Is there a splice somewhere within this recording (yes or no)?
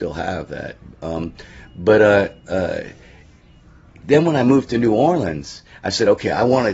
no